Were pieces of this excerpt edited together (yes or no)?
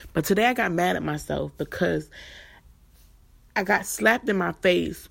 no